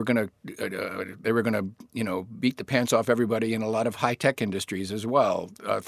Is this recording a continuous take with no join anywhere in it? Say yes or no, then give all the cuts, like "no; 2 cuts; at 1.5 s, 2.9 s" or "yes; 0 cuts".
yes; 0 cuts